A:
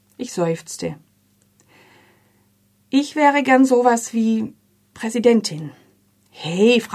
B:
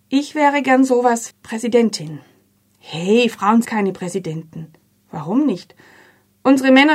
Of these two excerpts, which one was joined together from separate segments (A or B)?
B